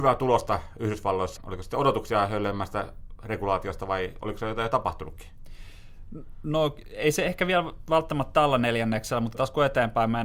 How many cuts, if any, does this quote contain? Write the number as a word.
two